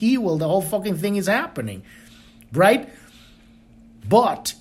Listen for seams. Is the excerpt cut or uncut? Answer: uncut